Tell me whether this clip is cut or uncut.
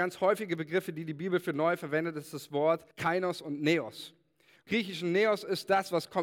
cut